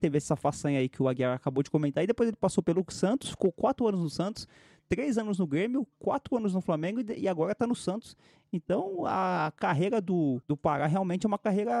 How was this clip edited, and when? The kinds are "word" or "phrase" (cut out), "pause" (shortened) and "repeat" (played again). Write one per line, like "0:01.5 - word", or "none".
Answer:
none